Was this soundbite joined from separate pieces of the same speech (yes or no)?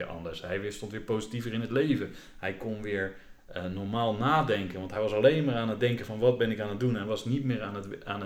no